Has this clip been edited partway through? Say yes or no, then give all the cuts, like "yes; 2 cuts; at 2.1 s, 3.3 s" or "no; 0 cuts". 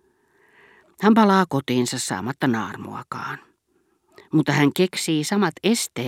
no; 0 cuts